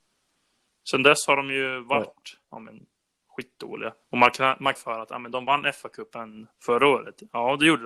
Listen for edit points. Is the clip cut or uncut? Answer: cut